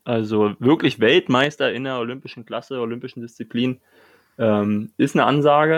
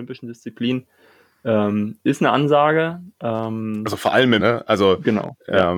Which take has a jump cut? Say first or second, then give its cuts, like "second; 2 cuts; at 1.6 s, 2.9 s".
second; 1 cut; at 4.4 s